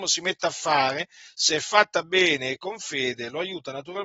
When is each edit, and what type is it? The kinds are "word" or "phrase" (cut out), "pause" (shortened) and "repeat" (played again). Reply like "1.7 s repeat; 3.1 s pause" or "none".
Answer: none